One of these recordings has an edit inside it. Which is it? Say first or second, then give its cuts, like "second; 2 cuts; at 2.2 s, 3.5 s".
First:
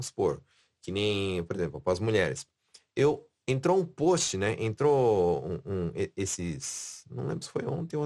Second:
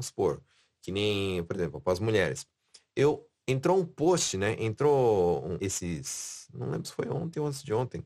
second; 1 cut; at 5.6 s